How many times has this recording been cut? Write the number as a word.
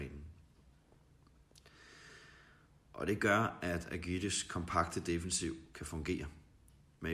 zero